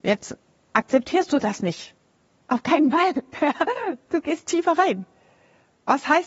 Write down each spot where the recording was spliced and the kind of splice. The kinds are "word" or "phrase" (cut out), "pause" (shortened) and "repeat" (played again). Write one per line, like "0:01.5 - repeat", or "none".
none

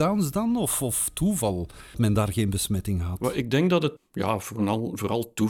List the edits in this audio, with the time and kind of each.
0:01.9 - word
0:04.0 - word

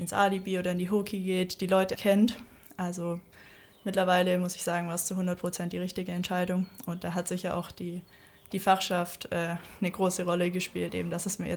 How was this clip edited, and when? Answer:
0:01.9 - word

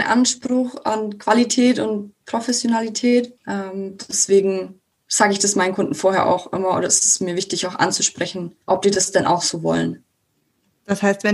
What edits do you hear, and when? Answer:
0:03.4 - pause
0:08.6 - pause

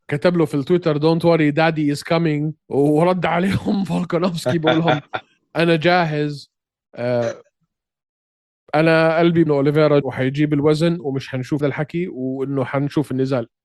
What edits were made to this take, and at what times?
0:02.6 - pause
0:09.5 - phrase
0:10.0 - word
0:11.6 - phrase

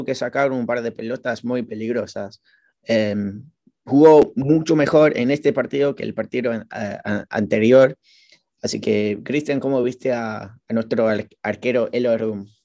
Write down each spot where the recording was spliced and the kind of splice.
none

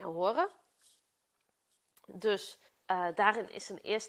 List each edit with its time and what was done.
0:02.7 - pause

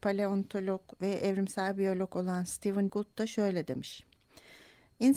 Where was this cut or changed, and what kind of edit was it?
0:00.9 - pause
0:02.9 - word

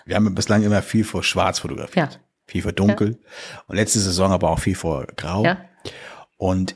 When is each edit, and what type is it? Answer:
none

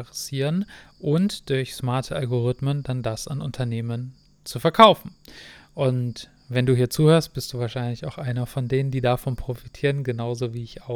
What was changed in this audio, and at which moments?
none

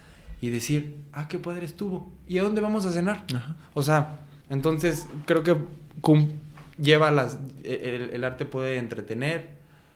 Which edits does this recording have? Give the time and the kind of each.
0:04.4 - pause
0:06.7 - pause

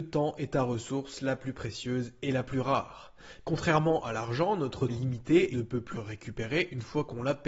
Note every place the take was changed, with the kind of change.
0:04.9 - word
0:05.5 - word
0:05.9 - word

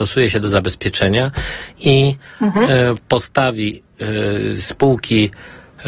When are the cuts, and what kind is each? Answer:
none

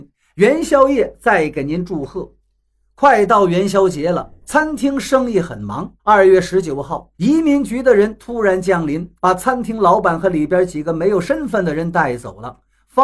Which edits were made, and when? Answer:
0:02.4 - pause
0:06.0 - pause
0:07.1 - pause
0:09.2 - pause

